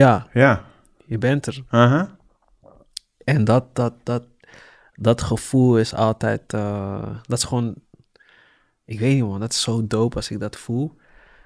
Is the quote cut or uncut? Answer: uncut